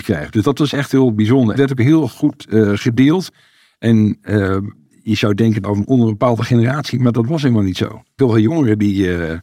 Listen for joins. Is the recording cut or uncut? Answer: cut